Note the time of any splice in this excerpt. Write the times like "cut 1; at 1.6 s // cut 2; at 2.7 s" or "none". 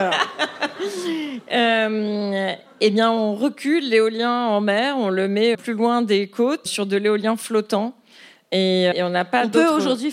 cut 1; at 5.5 s // cut 2; at 6.7 s // cut 3; at 8.9 s